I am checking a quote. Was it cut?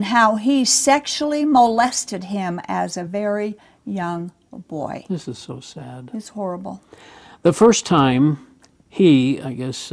no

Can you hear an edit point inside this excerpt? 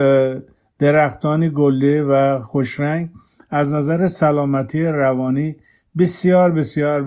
no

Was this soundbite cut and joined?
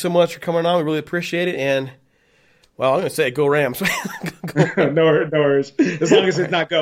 no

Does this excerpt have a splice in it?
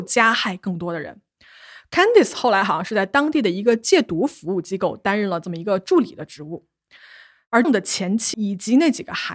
yes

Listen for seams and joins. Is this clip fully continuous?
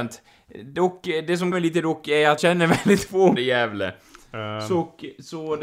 no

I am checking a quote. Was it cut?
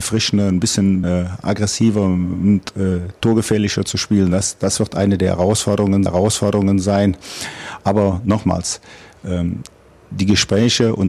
yes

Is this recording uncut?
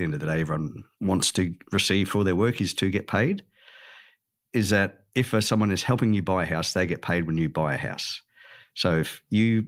yes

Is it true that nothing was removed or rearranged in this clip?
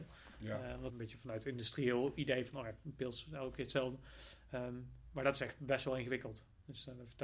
no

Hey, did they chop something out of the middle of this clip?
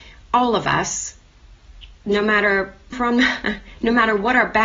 yes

